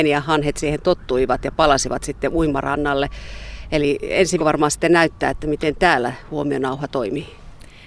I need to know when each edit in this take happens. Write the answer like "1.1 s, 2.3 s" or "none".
4.4 s